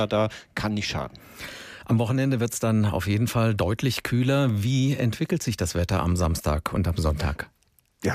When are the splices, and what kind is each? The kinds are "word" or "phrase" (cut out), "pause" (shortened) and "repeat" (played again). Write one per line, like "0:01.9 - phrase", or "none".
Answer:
none

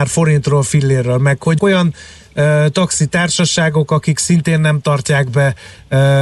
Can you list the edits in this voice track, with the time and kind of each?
0:01.6 - word

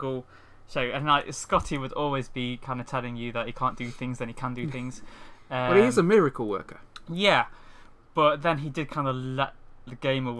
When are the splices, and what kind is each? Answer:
none

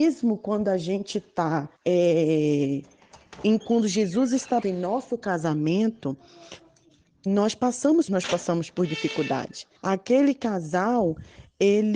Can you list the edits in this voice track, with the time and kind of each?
0:01.7 - pause
0:03.6 - word
0:04.6 - word
0:07.3 - word
0:08.1 - phrase
0:09.8 - pause

